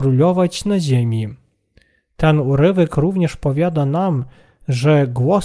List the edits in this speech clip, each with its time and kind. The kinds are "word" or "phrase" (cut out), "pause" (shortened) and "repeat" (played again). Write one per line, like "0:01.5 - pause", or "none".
none